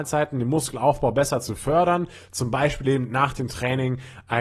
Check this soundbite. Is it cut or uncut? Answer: uncut